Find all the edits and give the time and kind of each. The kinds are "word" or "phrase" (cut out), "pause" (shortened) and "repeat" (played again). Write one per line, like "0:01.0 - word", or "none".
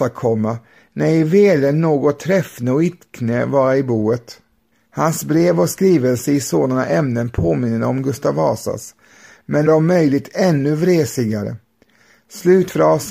0:04.7 - pause
0:09.7 - word